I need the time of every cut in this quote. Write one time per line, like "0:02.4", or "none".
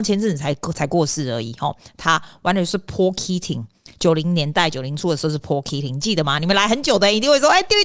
none